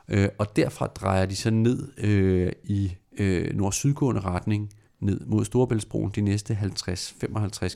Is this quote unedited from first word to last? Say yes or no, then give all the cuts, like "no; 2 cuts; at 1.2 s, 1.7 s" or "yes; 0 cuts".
no; 1 cut; at 4.9 s